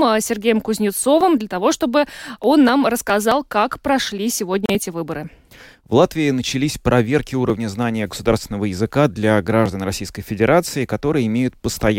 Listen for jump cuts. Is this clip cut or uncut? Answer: uncut